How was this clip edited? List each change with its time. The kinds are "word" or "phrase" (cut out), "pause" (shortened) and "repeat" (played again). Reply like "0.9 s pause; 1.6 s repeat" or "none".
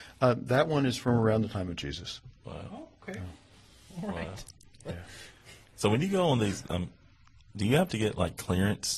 none